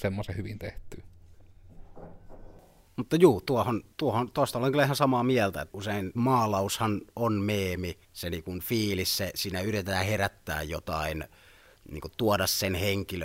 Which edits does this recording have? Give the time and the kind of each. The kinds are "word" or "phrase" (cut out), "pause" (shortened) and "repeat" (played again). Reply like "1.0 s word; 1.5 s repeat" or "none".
3.9 s pause; 5.7 s word; 6.1 s phrase; 8.0 s pause